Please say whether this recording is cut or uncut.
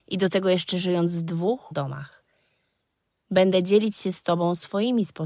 cut